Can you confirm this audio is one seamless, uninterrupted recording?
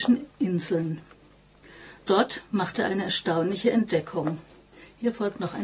yes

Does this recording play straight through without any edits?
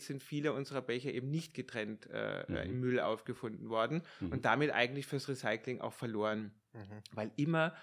yes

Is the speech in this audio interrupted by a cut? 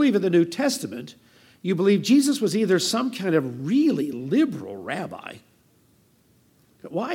no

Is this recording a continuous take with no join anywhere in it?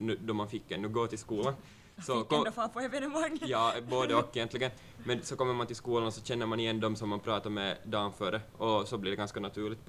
yes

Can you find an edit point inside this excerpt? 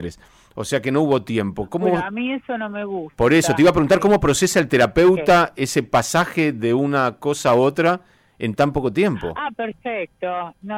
no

